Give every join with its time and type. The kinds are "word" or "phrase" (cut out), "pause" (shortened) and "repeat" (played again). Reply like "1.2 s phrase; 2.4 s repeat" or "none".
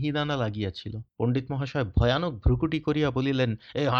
1.1 s pause